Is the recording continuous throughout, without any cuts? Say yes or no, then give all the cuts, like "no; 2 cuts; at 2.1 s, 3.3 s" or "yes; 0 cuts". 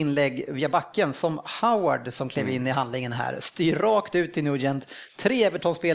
yes; 0 cuts